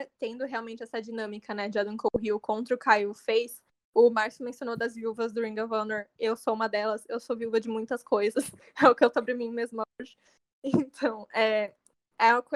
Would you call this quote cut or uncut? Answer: cut